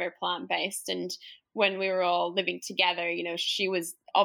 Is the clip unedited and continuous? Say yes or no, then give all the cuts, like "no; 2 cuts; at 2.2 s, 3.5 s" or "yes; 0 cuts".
yes; 0 cuts